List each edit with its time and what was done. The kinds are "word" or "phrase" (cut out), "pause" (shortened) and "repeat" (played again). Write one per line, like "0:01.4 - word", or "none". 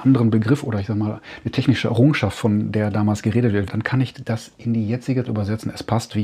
0:03.7 - word
0:05.3 - word